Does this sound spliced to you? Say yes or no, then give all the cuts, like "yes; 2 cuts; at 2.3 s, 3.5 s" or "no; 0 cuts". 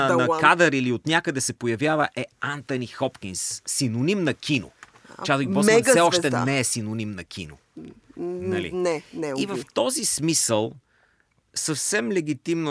no; 0 cuts